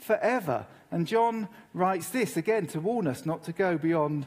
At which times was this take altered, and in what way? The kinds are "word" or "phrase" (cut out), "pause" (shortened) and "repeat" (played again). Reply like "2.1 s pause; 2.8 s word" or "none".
none